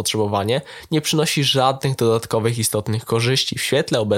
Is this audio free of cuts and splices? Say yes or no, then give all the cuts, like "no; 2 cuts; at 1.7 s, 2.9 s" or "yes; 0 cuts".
yes; 0 cuts